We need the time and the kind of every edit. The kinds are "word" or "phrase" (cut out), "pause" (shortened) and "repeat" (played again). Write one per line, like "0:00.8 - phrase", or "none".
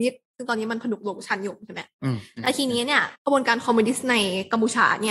0:03.2 - pause